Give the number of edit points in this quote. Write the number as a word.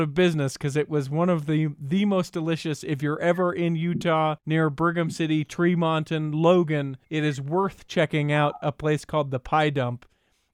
two